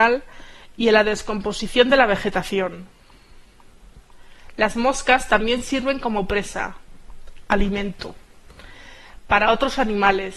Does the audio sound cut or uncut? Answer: uncut